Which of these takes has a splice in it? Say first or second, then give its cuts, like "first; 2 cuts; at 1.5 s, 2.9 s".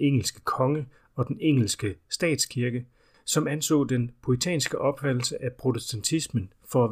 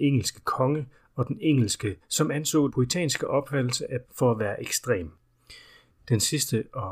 second; 3 cuts; at 2.0 s, 2.7 s, 4.0 s